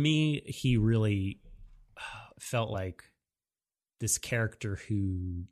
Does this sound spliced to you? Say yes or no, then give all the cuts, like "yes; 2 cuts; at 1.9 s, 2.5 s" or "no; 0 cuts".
no; 0 cuts